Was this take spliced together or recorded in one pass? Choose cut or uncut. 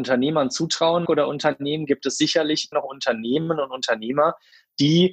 cut